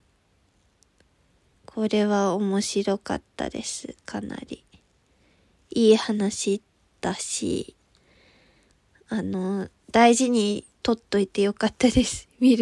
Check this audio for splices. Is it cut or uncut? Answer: cut